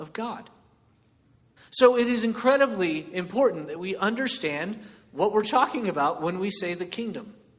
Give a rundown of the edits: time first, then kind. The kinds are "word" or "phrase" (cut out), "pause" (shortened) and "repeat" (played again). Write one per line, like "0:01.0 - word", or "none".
none